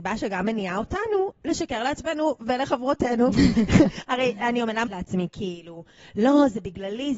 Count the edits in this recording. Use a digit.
1